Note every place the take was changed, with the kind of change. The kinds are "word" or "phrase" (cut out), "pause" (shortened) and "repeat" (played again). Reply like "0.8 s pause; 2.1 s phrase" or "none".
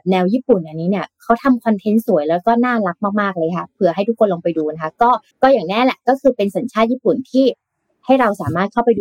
5.3 s pause

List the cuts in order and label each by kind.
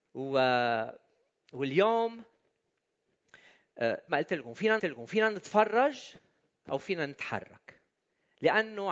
4.1 s word; 4.8 s repeat

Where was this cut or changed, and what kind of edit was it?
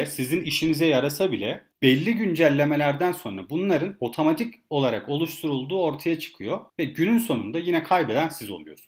1.7 s pause; 6.7 s pause

